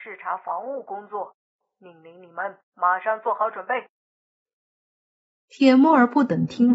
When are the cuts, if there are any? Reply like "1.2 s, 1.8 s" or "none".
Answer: 2.6 s